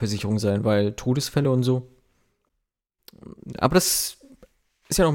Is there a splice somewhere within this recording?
no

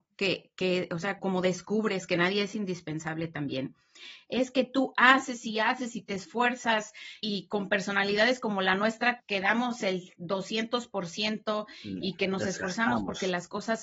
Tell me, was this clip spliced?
yes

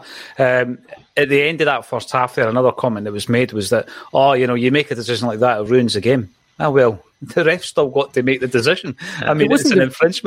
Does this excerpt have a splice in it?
no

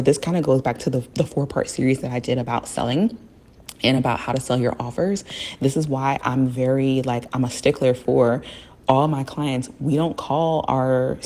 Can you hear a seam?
no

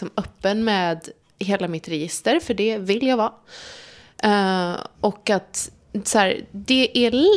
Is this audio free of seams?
yes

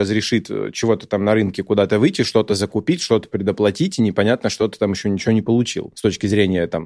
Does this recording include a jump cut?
no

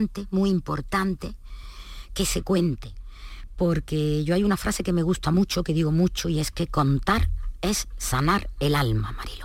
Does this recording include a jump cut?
no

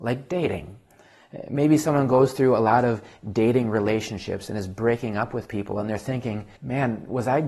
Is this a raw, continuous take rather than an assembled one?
no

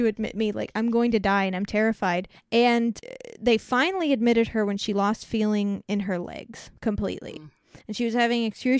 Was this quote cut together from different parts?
yes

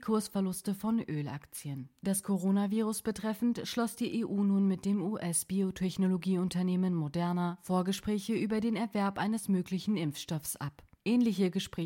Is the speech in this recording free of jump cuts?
yes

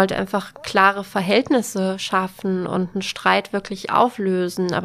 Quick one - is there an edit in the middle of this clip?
no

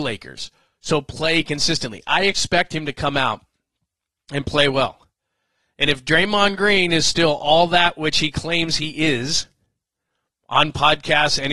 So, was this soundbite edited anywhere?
no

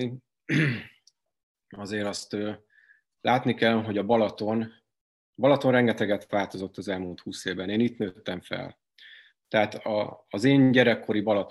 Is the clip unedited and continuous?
yes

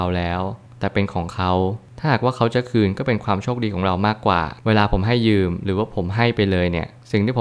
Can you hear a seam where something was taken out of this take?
yes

